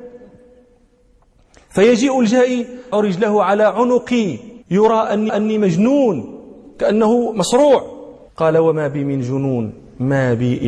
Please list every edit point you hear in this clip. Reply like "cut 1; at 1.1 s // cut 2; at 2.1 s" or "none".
cut 1; at 2.9 s // cut 2; at 4.6 s // cut 3; at 5.3 s // cut 4; at 8.3 s